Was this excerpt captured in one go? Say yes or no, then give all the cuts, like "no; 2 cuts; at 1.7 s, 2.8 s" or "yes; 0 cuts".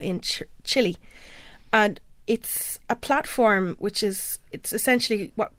yes; 0 cuts